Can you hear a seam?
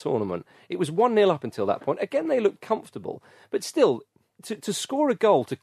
no; 0 cuts

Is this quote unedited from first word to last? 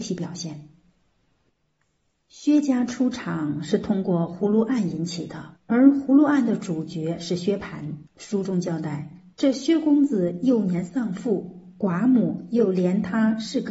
no; 3 cuts; at 5.6 s, 8.1 s, 9.3 s

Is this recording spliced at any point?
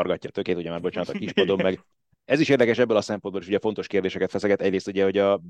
no; 0 cuts

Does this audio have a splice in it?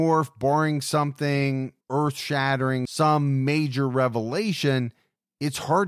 yes; 1 cut; at 1.8 s

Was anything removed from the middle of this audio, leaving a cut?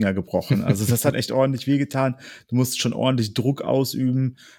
yes; 1 cut; at 1.1 s

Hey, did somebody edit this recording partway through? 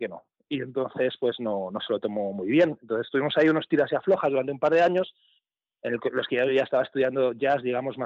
no; 0 cuts

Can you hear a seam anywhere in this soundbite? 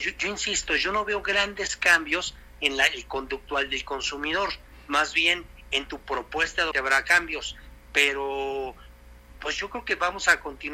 yes; 1 cut; at 6.7 s

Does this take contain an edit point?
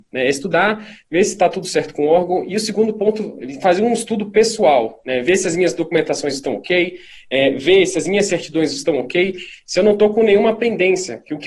no; 0 cuts

